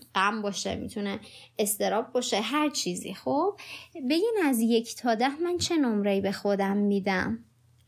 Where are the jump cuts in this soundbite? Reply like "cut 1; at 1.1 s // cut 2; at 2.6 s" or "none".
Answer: none